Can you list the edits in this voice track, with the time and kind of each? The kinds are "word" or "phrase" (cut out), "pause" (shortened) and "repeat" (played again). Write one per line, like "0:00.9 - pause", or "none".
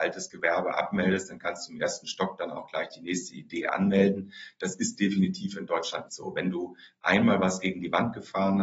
0:06.1 - word